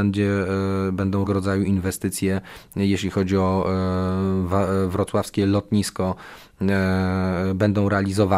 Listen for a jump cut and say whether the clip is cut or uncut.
cut